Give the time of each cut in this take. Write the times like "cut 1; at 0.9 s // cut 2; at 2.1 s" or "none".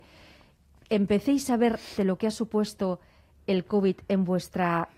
cut 1; at 2.0 s